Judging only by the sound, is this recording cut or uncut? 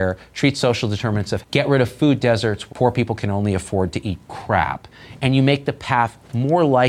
cut